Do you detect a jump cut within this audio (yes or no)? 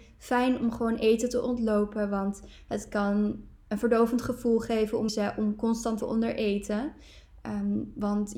yes